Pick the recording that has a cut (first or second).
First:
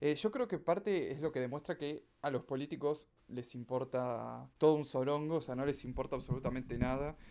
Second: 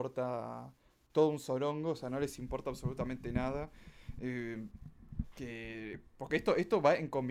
first